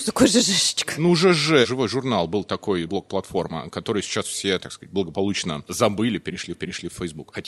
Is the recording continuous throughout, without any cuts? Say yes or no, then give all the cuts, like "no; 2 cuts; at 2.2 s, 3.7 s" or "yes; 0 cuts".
no; 1 cut; at 6.5 s